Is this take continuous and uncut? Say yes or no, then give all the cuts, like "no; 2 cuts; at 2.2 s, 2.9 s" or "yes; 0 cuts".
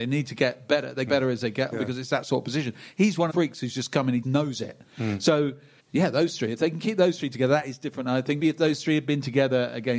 no; 6 cuts; at 1.1 s, 1.7 s, 3.3 s, 4.2 s, 5.8 s, 8.4 s